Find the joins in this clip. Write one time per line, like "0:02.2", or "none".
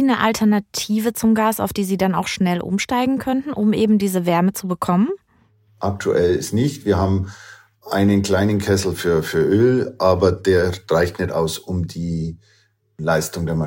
none